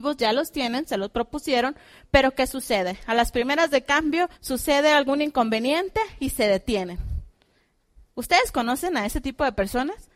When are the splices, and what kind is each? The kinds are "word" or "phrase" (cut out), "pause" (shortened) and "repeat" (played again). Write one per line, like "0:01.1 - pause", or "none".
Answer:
0:04.4 - pause